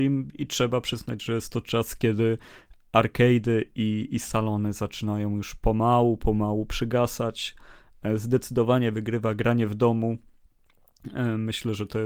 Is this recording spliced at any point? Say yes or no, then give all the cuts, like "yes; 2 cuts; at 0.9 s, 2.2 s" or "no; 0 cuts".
no; 0 cuts